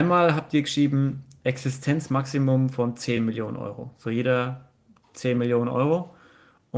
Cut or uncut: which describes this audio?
uncut